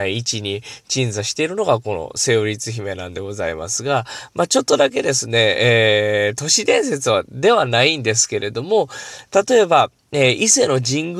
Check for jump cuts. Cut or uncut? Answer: uncut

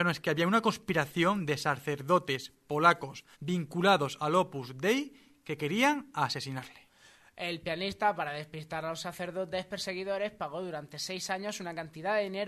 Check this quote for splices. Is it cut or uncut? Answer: cut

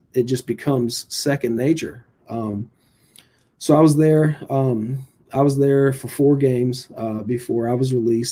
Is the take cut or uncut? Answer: uncut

